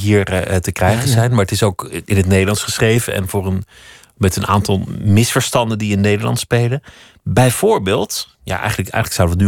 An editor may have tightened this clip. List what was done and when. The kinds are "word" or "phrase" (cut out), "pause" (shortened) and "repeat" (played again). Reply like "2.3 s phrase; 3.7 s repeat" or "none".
none